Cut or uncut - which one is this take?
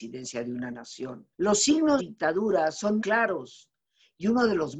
cut